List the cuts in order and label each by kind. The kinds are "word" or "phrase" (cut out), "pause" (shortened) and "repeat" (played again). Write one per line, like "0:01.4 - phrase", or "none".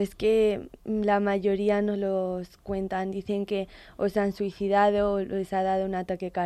none

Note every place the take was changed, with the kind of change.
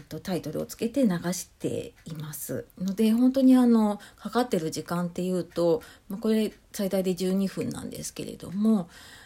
0:02.7 - pause

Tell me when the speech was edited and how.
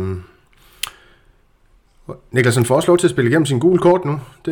none

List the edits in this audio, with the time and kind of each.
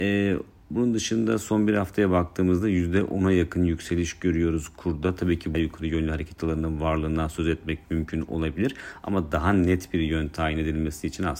0:05.5 - phrase

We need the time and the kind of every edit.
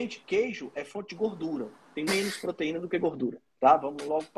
0:02.1 - word
0:03.5 - pause

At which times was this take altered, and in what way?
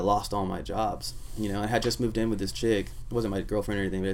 none

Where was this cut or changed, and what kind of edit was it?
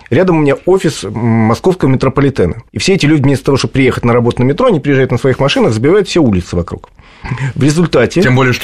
0:02.7 - pause

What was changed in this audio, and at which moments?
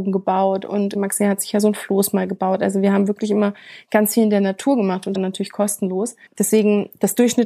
0:00.9 - word
0:05.1 - phrase
0:06.3 - pause

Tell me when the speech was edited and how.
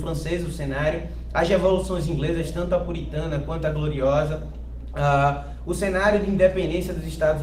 none

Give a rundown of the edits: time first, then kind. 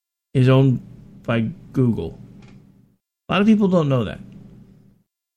none

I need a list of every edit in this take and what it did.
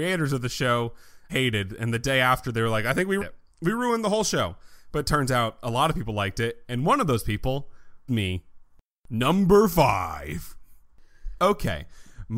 0:01.3 - word
0:03.2 - word
0:08.1 - word

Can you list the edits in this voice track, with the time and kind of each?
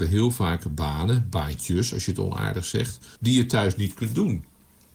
0:03.2 - pause

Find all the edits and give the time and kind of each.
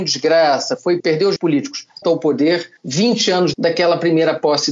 0:01.0 - word
0:01.4 - word
0:02.0 - phrase
0:02.8 - pause
0:03.5 - word

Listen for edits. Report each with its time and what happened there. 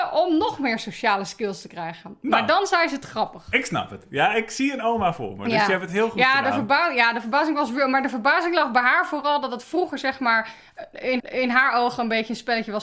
0:11.2 - repeat

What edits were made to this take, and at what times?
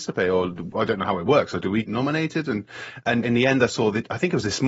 0:01.8 - word
0:03.2 - word

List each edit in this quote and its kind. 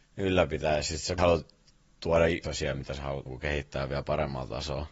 0:01.2 - word
0:02.4 - phrase
0:03.3 - word

